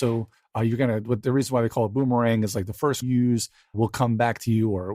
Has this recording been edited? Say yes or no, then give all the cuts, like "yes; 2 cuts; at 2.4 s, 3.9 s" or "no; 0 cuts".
yes; 2 cuts; at 3.0 s, 3.7 s